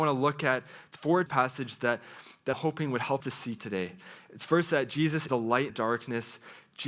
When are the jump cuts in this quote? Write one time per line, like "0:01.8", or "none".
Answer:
0:01.3
0:02.5
0:03.2
0:03.6
0:05.3
0:05.7